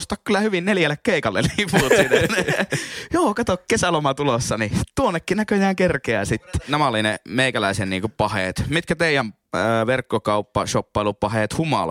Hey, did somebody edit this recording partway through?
no; 0 cuts

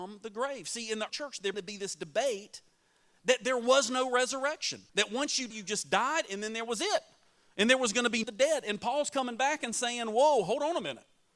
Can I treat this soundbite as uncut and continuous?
no; 5 cuts; at 1.1 s, 1.5 s, 4.9 s, 5.5 s, 8.2 s

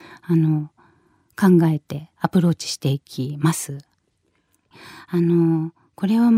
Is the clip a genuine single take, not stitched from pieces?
no; 1 cut; at 2.1 s

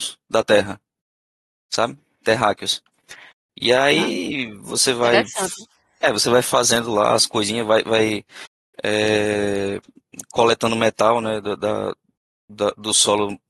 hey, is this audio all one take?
yes; 0 cuts

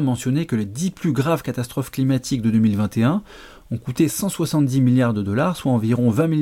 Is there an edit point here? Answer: no; 0 cuts

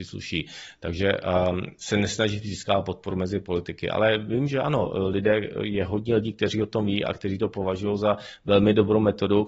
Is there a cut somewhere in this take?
no; 0 cuts

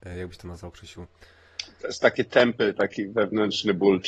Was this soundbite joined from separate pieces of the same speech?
no; 0 cuts

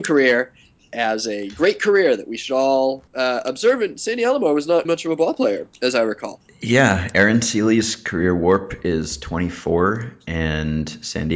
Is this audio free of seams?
no; 2 cuts; at 3.1 s, 4.8 s

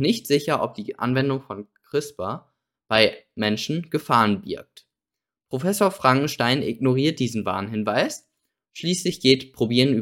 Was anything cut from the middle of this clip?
no; 0 cuts

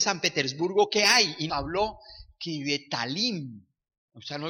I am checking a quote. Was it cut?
yes; 1 cut; at 1.5 s

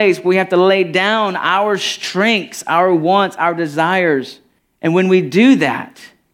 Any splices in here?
yes; 1 cut; at 4.6 s

